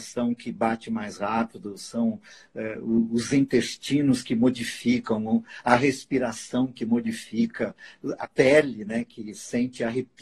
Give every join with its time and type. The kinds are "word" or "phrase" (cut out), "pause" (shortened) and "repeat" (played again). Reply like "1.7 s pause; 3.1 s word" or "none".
8.2 s word